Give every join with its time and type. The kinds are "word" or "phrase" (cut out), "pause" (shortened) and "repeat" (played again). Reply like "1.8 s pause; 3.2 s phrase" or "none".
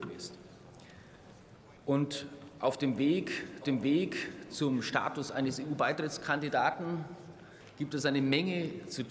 1.8 s pause; 3.6 s repeat